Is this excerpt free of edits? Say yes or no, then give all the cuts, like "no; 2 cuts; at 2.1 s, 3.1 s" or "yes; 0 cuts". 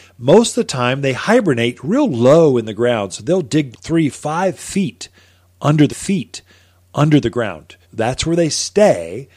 no; 4 cuts; at 3.7 s, 4.1 s, 5.9 s, 7.8 s